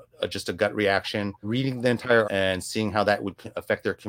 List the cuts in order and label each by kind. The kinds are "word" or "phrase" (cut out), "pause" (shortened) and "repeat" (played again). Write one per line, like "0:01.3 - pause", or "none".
0:01.4 - word
0:02.2 - word